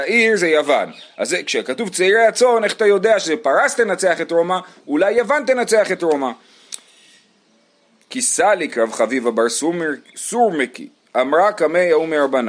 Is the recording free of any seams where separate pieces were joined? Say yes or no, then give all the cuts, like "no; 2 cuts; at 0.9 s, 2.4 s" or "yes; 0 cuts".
yes; 0 cuts